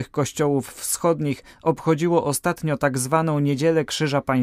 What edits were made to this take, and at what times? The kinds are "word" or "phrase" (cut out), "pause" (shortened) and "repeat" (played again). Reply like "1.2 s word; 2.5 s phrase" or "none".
none